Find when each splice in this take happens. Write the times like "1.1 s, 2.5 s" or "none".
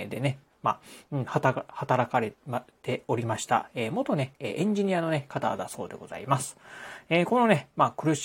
4.4 s